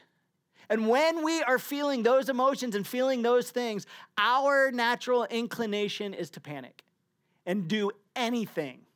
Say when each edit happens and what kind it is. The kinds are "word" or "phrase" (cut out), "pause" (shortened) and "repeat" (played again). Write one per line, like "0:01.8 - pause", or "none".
none